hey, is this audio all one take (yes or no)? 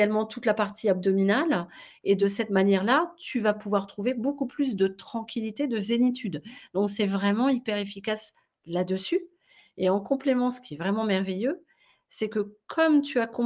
yes